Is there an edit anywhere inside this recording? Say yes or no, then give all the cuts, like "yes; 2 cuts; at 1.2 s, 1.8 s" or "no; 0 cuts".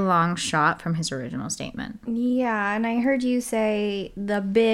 no; 0 cuts